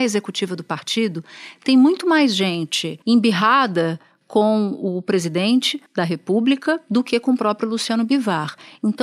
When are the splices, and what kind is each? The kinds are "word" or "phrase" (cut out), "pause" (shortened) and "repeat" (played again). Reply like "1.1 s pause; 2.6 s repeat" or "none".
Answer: 3.0 s pause; 5.9 s pause